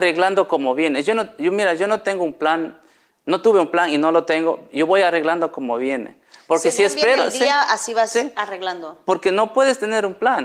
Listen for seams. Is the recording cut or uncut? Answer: uncut